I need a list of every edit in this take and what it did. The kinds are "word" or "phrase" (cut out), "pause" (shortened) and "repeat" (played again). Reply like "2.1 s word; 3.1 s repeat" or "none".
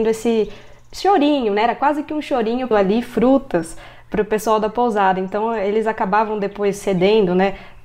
2.7 s word